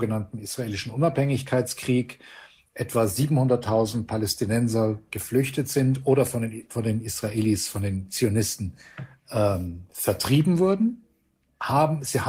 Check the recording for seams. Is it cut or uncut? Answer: uncut